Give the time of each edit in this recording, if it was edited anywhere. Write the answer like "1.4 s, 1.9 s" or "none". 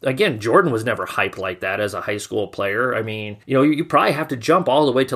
3.4 s